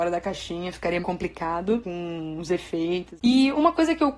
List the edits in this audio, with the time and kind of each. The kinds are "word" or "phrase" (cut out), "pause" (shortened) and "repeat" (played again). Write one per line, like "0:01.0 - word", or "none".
0:01.0 - word